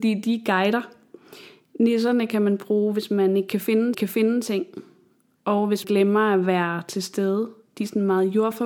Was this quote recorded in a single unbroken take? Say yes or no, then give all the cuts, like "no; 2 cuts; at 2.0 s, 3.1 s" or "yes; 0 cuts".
no; 2 cuts; at 3.9 s, 5.8 s